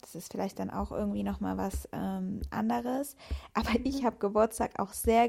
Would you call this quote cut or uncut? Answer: uncut